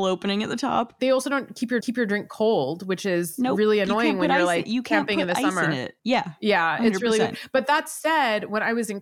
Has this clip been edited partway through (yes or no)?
yes